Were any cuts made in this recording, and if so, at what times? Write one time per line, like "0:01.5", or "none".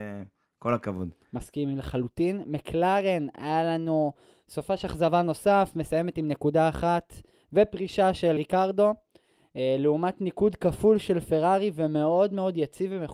0:08.4